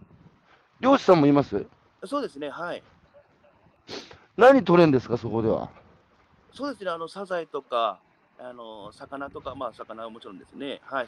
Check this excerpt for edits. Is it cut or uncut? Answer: uncut